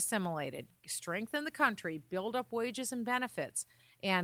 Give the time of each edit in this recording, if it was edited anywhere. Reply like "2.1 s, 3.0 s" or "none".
none